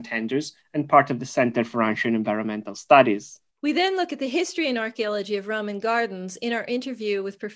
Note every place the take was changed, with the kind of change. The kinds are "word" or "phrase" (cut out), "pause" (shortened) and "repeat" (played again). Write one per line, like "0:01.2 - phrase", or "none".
0:03.5 - pause